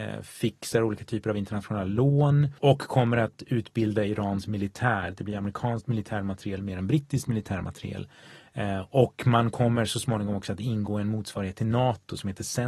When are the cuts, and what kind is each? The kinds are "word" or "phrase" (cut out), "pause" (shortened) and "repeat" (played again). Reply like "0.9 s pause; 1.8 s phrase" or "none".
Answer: 2.6 s pause